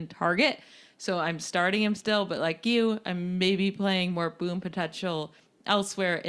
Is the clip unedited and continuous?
yes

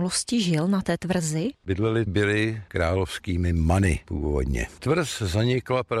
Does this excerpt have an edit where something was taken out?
yes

